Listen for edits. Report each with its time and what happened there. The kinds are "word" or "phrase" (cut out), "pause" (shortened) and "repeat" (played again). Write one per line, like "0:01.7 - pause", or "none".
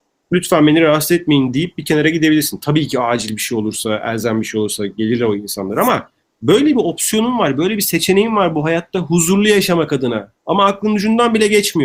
0:06.2 - pause
0:10.4 - pause